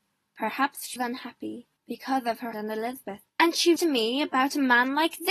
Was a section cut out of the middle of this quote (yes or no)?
yes